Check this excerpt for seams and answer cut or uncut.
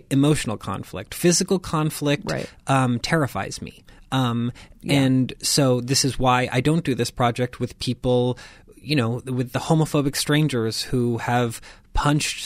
uncut